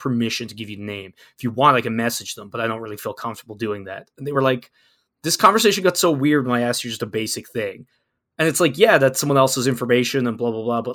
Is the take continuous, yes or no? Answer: yes